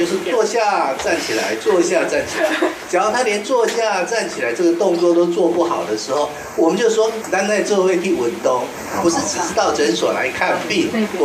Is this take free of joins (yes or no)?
no